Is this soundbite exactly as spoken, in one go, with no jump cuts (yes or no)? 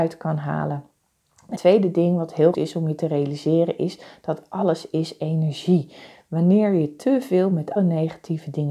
no